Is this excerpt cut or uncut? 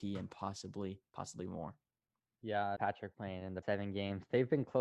cut